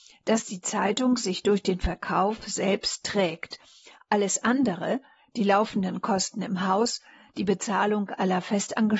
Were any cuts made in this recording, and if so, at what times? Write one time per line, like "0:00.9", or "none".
none